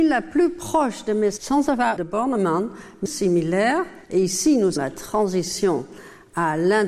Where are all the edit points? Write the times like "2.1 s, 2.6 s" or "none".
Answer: 1.4 s, 2.0 s, 3.1 s, 4.0 s, 4.8 s